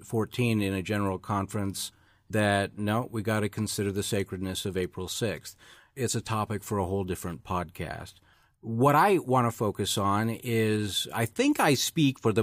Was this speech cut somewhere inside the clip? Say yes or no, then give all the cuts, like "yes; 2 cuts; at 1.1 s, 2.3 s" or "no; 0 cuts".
no; 0 cuts